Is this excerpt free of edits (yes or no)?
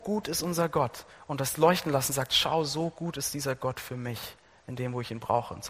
yes